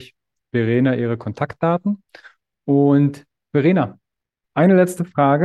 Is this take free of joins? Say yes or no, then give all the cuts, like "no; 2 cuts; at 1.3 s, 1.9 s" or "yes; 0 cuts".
yes; 0 cuts